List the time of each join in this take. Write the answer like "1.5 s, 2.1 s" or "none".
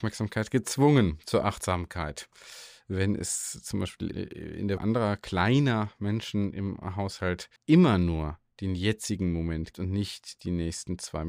4.1 s, 4.8 s, 7.6 s, 9.7 s